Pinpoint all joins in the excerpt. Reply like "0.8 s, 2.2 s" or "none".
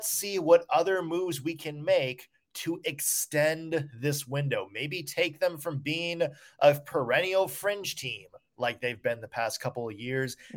none